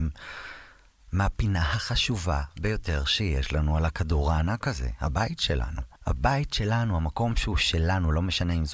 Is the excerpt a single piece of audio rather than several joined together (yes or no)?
no